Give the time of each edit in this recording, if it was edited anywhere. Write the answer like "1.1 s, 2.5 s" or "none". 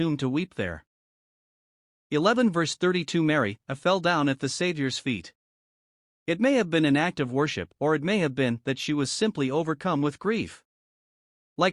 7.7 s